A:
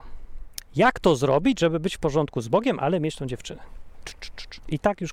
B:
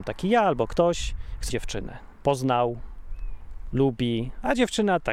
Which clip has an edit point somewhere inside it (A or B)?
B